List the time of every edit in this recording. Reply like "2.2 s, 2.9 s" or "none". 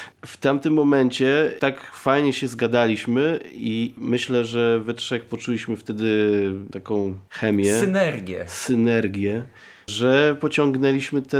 none